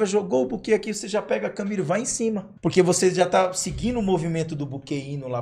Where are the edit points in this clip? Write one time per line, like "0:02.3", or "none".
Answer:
0:02.6

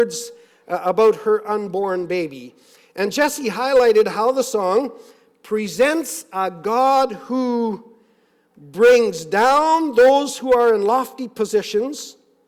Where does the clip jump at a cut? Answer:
none

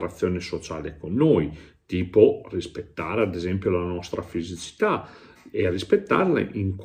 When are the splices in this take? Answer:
none

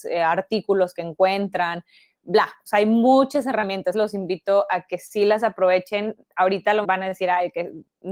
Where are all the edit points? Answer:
0:03.9
0:06.8

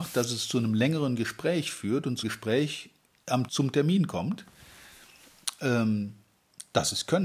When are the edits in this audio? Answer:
0:02.2
0:03.5

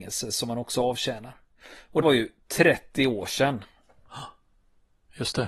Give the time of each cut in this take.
0:02.0

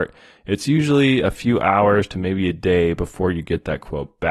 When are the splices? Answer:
none

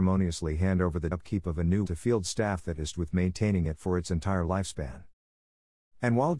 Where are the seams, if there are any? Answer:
0:01.1
0:01.8
0:02.9

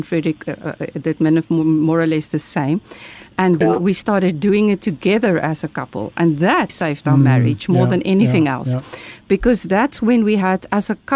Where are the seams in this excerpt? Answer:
0:03.6
0:06.7

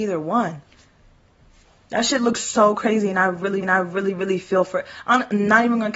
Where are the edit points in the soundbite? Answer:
0:03.6

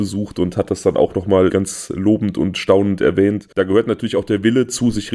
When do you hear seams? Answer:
0:01.5
0:03.5

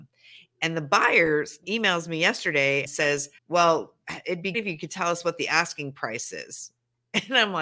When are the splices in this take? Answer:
0:01.6
0:02.8
0:03.4
0:04.5

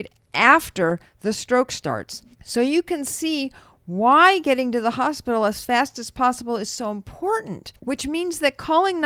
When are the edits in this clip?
0:02.3
0:07.8

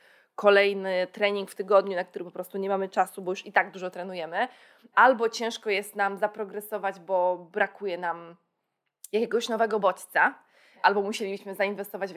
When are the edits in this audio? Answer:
none

